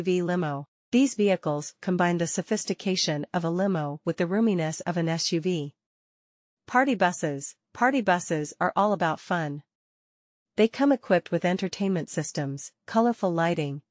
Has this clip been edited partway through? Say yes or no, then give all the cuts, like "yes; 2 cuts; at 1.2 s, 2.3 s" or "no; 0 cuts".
no; 0 cuts